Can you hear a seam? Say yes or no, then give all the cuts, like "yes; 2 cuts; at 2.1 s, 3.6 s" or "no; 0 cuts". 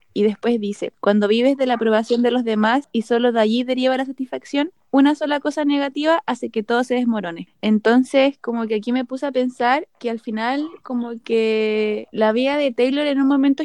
no; 0 cuts